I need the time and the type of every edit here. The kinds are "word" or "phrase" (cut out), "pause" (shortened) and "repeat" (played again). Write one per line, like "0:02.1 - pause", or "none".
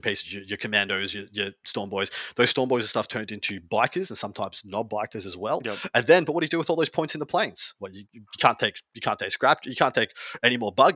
none